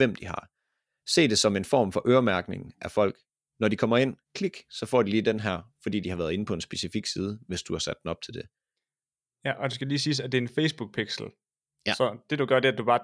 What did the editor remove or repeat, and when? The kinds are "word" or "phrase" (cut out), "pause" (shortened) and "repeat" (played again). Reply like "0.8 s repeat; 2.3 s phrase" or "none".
4.2 s pause